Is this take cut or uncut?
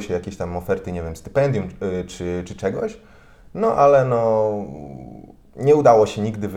uncut